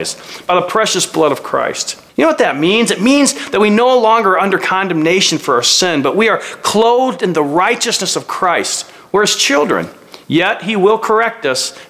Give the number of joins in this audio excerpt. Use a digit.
1